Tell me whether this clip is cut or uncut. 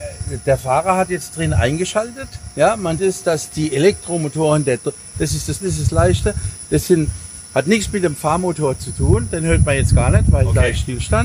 cut